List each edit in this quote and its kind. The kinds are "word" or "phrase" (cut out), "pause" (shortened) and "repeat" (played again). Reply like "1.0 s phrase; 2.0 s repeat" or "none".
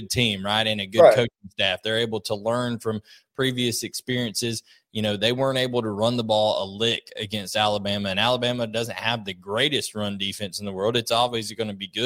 none